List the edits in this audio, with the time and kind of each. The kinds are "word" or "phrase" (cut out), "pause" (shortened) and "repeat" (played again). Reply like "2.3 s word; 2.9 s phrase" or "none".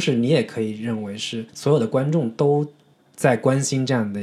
1.5 s pause; 2.9 s pause